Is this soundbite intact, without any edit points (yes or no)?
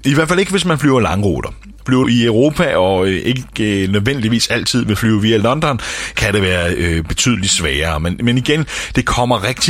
no